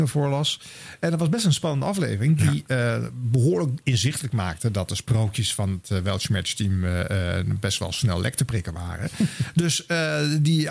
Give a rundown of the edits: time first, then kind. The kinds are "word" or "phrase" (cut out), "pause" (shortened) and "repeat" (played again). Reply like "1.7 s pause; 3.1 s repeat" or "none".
none